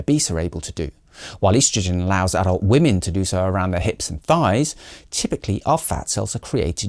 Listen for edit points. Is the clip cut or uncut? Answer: uncut